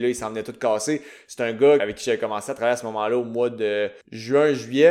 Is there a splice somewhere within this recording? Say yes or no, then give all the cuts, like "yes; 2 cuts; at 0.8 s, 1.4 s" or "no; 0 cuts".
yes; 2 cuts; at 1.8 s, 4.0 s